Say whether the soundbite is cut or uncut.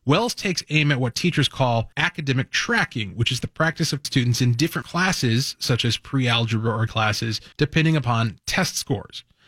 cut